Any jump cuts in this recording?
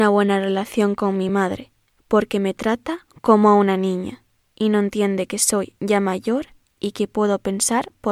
no; 0 cuts

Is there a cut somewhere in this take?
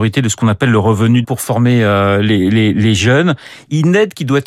yes; 1 cut; at 1.2 s

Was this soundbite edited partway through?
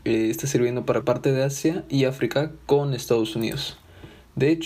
yes; 1 cut; at 1.0 s

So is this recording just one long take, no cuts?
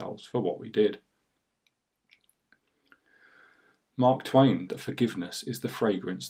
no; 1 cut; at 4.7 s

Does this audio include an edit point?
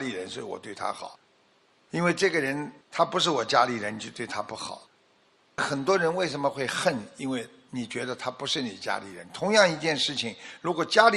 yes; 1 cut; at 2.8 s

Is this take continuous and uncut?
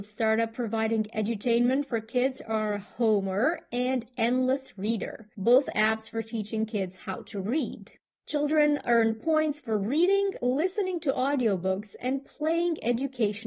no; 2 cuts; at 5.3 s, 8.0 s

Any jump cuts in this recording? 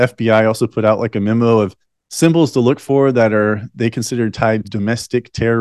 yes; 2 cuts; at 2.0 s, 4.6 s

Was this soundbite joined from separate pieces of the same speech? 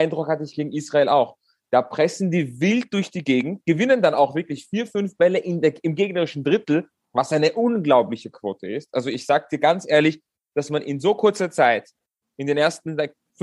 no; 0 cuts

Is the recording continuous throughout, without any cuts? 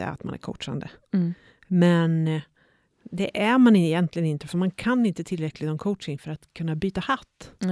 yes; 0 cuts

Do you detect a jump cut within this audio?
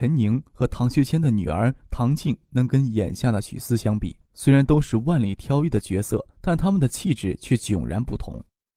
yes; 2 cuts; at 4.2 s, 6.3 s

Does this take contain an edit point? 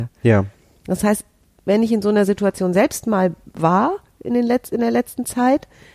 no; 0 cuts

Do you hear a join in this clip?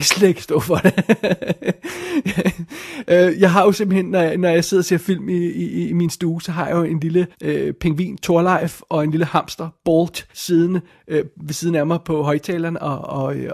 yes; 2 cuts; at 7.3 s, 10.3 s

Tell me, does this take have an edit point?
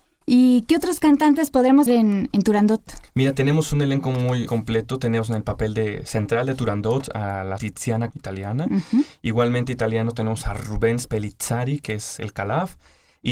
yes; 5 cuts; at 1.9 s, 3.1 s, 4.5 s, 7.6 s, 8.1 s

